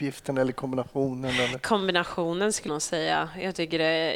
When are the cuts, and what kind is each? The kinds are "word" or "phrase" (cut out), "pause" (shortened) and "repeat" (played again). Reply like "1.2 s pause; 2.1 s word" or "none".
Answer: 2.7 s word

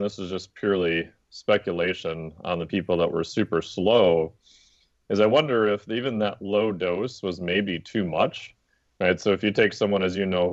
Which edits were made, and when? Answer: none

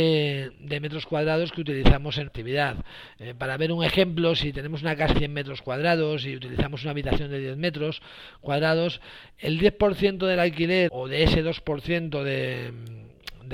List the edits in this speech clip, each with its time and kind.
2.3 s word; 5.1 s word; 10.9 s word

